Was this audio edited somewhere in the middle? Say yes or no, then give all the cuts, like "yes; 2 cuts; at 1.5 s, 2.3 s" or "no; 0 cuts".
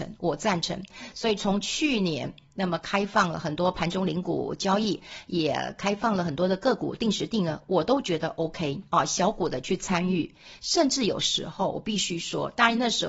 yes; 1 cut; at 8.9 s